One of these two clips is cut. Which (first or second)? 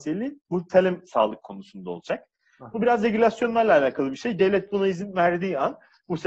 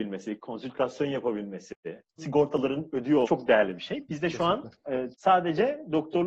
second